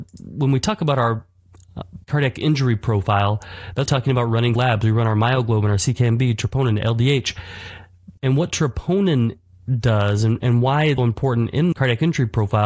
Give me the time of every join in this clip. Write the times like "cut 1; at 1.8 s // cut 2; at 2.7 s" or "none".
cut 1; at 2.0 s // cut 2; at 3.9 s // cut 3; at 4.6 s // cut 4; at 8.2 s // cut 5; at 11.0 s // cut 6; at 11.7 s

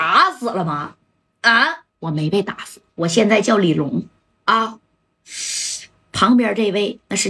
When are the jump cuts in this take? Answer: cut 1; at 1.9 s // cut 2; at 2.9 s // cut 3; at 4.2 s

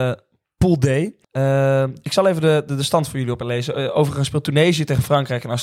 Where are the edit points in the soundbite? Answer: cut 1; at 1.2 s

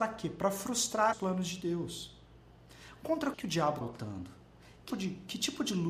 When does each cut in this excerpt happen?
cut 1; at 1.1 s // cut 2; at 3.3 s // cut 3; at 3.8 s // cut 4; at 4.9 s

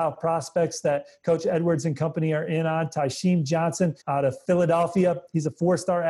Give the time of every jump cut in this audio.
cut 1; at 4.0 s

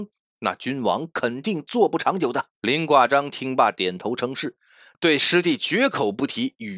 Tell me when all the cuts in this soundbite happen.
cut 1; at 2.6 s

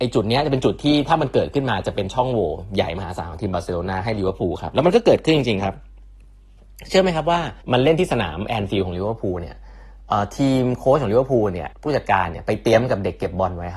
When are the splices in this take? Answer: cut 1; at 7.6 s // cut 2; at 11.7 s

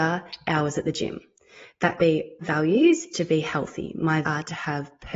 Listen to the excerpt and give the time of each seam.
cut 1; at 2.0 s // cut 2; at 2.4 s // cut 3; at 3.1 s // cut 4; at 4.2 s

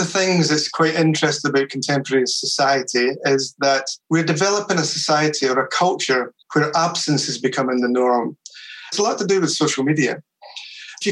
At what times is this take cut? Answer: cut 1; at 4.0 s // cut 2; at 6.4 s

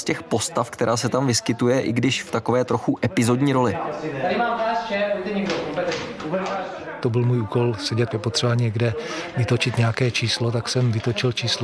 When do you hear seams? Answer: cut 1; at 8.1 s

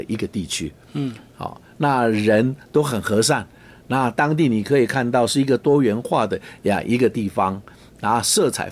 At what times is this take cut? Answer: none

